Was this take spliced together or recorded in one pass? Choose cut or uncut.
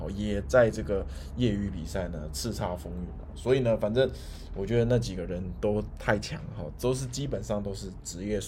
uncut